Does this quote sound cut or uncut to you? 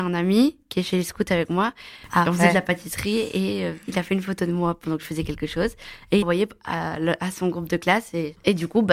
cut